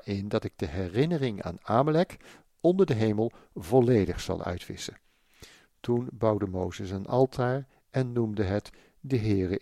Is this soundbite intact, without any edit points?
yes; 0 cuts

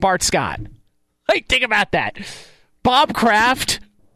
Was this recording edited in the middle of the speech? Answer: no; 0 cuts

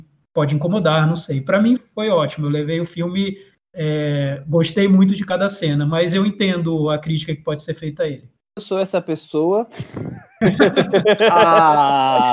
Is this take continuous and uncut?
no; 1 cut; at 1.8 s

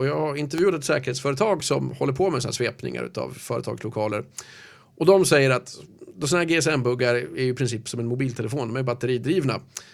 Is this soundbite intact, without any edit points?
yes; 0 cuts

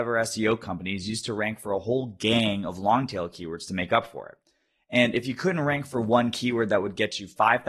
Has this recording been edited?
no; 0 cuts

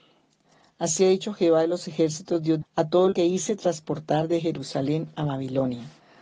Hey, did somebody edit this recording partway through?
yes; 2 cuts; at 2.6 s, 3.1 s

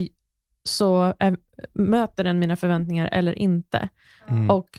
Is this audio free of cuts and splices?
yes; 0 cuts

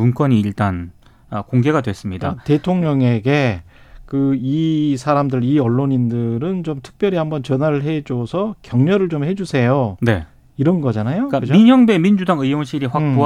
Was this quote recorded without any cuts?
yes; 0 cuts

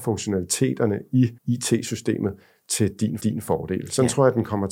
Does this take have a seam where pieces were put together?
yes; 2 cuts; at 1.4 s, 3.2 s

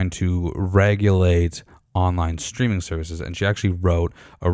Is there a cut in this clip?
no; 0 cuts

